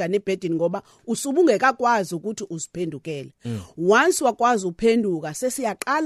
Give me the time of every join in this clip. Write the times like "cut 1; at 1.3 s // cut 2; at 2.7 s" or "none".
none